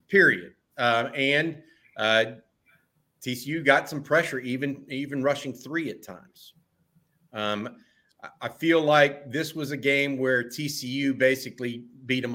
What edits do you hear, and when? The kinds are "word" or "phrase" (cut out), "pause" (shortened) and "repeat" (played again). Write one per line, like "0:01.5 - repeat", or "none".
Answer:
none